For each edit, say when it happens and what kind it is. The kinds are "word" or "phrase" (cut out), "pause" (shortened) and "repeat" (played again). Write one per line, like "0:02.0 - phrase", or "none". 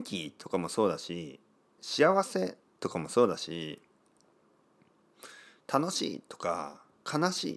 0:01.8 - word